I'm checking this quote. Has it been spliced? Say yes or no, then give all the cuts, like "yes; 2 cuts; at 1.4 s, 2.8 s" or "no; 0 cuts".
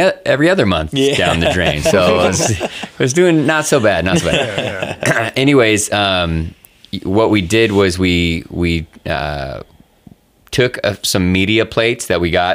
no; 0 cuts